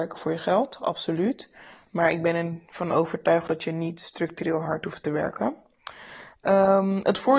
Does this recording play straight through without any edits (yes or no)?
yes